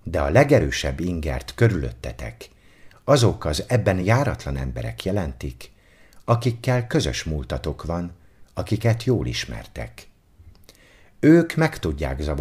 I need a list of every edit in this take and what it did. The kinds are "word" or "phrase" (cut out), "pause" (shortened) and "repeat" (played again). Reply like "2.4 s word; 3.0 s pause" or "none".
none